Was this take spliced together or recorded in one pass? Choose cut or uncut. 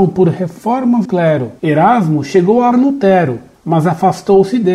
cut